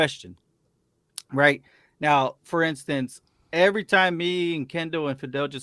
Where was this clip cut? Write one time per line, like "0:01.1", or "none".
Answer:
none